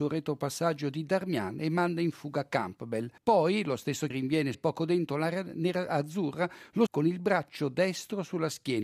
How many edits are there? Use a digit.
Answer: 4